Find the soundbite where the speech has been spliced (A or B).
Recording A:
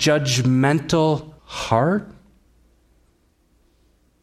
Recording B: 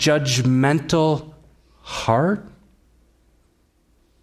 A